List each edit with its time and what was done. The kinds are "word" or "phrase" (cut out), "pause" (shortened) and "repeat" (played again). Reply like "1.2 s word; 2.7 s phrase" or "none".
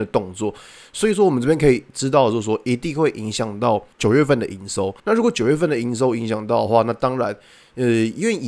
3.9 s pause; 5.0 s pause